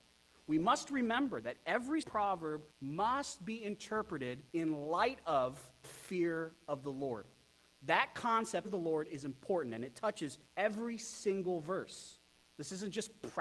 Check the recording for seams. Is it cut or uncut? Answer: cut